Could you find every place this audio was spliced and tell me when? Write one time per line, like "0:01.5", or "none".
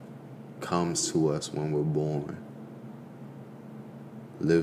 none